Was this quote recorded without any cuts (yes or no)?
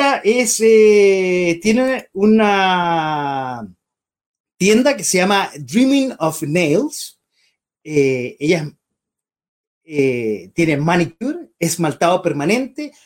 yes